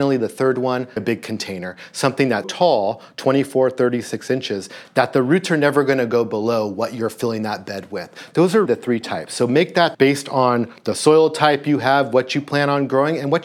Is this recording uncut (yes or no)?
no